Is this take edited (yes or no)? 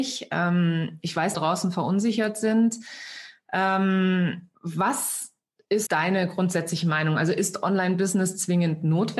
yes